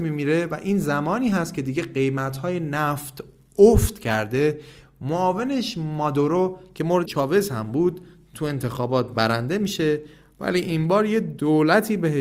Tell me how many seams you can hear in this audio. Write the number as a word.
one